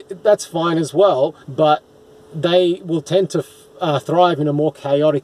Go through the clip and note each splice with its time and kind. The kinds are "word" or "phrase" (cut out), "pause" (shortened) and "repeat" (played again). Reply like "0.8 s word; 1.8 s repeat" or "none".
1.4 s pause